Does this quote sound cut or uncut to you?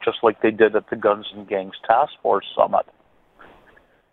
uncut